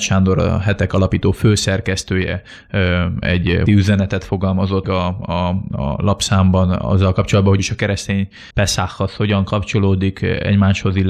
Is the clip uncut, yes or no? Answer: no